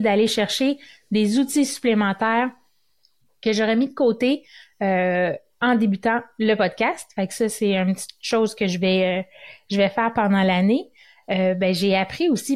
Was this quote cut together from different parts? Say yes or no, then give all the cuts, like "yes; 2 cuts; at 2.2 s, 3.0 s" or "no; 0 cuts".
no; 0 cuts